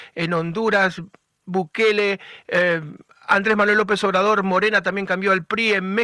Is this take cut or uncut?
uncut